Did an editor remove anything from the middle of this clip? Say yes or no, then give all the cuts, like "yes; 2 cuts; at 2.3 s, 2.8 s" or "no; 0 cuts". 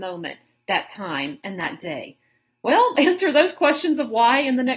yes; 1 cut; at 2.9 s